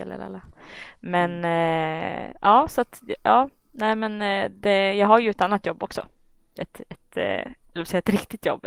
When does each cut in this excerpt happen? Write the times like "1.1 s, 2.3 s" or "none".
none